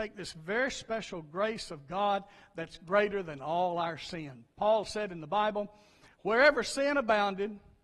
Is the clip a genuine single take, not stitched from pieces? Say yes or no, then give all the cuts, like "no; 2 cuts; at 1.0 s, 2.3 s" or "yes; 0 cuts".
yes; 0 cuts